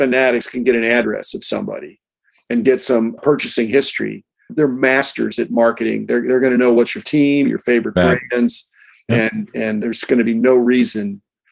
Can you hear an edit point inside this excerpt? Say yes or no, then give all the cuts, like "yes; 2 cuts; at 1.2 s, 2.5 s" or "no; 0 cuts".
yes; 2 cuts; at 7.0 s, 9.8 s